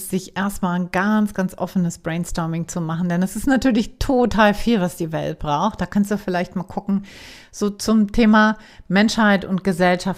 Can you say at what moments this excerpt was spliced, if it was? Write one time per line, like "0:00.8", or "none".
none